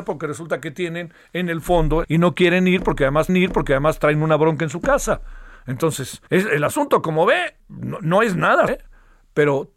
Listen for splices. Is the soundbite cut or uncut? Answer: cut